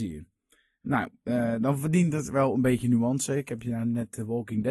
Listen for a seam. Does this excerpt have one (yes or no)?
no